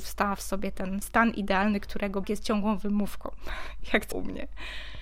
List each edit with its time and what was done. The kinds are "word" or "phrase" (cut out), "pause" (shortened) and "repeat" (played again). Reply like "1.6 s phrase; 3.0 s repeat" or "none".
1.0 s word; 2.2 s word; 4.1 s word